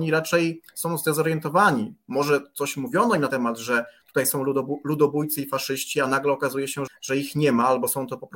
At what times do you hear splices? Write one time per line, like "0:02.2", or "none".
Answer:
0:03.3
0:06.9